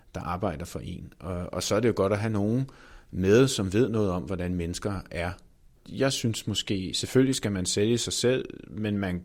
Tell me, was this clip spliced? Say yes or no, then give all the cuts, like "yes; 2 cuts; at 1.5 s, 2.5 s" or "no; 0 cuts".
no; 0 cuts